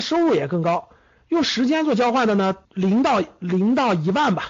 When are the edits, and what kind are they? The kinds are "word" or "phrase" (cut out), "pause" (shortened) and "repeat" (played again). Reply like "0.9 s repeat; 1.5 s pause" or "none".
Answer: 2.6 s pause